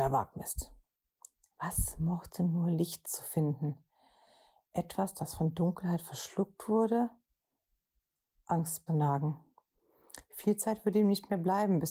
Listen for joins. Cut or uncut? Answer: cut